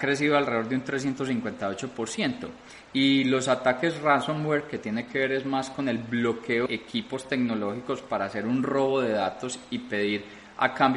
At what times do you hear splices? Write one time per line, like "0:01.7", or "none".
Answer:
0:06.7